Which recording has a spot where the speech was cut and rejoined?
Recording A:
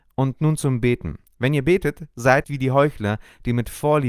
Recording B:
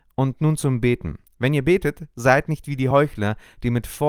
A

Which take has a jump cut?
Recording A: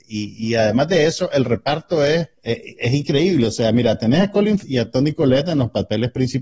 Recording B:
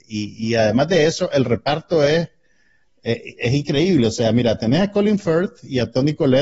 A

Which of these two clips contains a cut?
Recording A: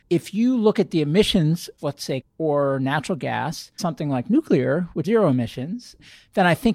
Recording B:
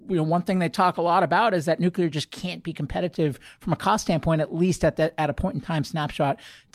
A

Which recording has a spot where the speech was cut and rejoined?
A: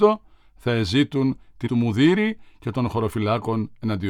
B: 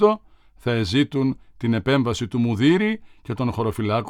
A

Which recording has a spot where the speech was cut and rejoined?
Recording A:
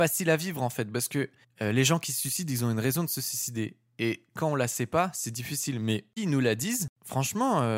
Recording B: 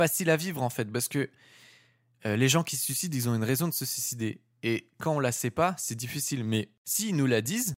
A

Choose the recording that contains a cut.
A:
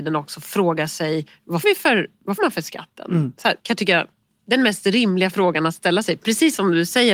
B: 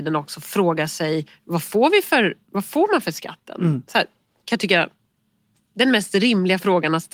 A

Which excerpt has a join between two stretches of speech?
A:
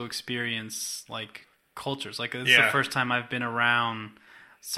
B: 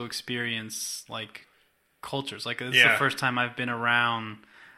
A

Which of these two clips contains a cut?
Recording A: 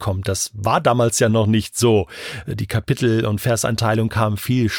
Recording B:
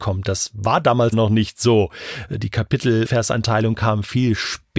B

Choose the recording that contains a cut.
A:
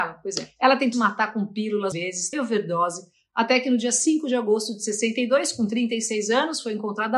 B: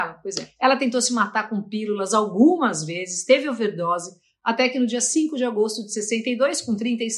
A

